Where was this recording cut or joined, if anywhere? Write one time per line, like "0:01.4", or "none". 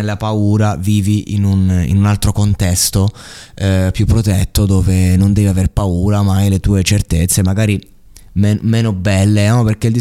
none